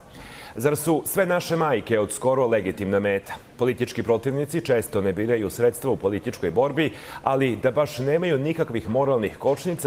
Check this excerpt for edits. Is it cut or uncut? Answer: uncut